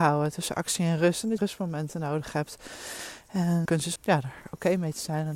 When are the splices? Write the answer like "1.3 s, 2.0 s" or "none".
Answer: 1.4 s, 3.7 s, 4.0 s